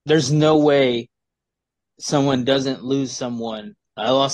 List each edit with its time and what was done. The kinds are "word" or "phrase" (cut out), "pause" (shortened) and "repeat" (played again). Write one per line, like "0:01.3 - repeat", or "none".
none